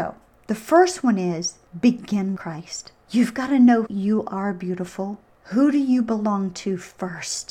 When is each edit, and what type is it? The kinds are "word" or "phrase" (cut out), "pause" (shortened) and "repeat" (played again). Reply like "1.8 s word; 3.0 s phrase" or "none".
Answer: 2.4 s word; 3.9 s word